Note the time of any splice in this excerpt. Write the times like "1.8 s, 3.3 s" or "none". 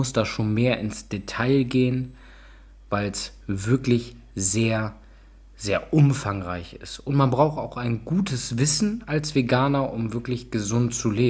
none